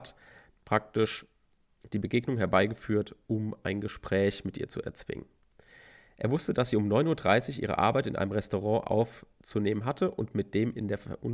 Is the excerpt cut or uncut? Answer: uncut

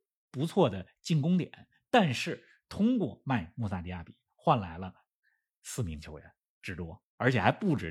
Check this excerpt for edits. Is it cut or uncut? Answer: uncut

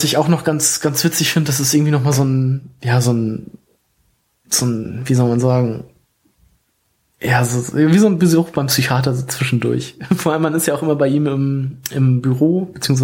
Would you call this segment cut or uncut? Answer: uncut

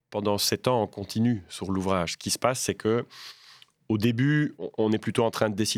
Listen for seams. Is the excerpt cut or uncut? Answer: uncut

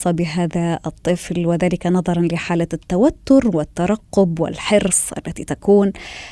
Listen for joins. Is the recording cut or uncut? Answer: uncut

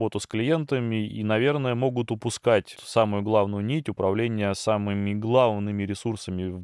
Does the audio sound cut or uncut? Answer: cut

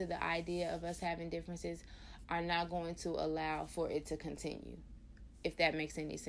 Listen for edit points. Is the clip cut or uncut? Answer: uncut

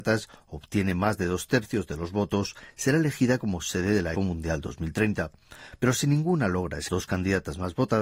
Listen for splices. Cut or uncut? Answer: cut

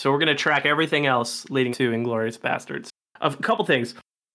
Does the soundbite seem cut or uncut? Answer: cut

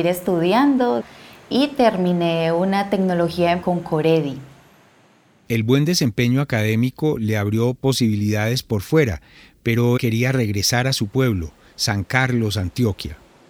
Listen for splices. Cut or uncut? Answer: cut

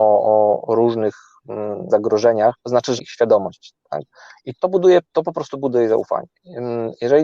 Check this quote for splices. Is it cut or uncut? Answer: cut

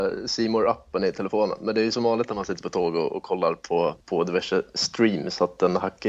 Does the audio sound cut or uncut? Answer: cut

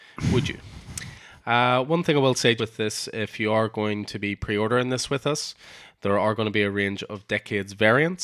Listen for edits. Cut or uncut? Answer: cut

